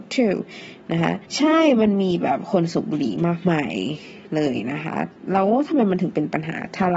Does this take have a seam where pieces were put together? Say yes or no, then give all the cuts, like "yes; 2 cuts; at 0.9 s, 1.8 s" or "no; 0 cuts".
yes; 1 cut; at 1.3 s